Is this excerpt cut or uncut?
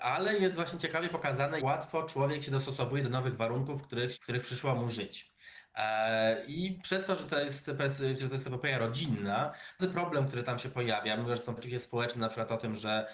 cut